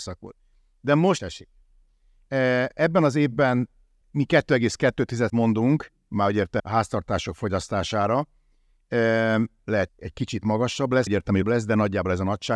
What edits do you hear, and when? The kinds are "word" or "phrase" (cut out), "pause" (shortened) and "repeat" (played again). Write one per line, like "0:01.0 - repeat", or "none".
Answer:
0:01.2 - word
0:04.0 - word
0:05.3 - word
0:06.6 - word
0:09.9 - word
0:11.1 - word
0:11.4 - word